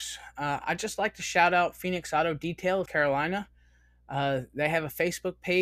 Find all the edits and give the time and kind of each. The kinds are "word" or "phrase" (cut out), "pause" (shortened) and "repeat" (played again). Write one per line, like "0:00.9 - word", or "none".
0:02.9 - word